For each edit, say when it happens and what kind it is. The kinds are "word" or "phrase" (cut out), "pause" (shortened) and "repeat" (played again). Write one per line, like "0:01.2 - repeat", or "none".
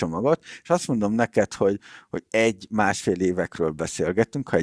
0:02.3 - phrase